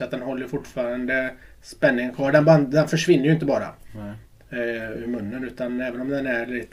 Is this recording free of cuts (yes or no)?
yes